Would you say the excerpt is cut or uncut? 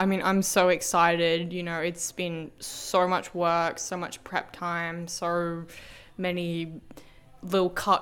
uncut